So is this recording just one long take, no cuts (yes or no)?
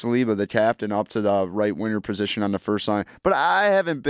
yes